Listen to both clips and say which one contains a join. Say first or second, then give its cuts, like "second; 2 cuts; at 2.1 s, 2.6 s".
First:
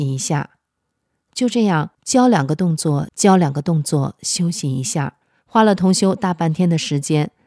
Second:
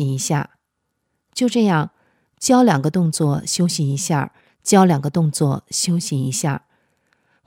first; 3 cuts; at 1.9 s, 3.1 s, 5.2 s